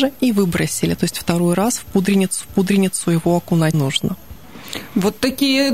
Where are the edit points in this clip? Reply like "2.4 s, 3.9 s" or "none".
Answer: 2.4 s, 3.7 s